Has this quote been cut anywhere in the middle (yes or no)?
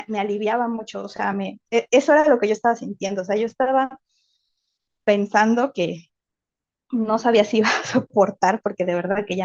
no